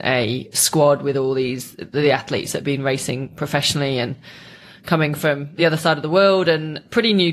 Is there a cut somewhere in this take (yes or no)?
no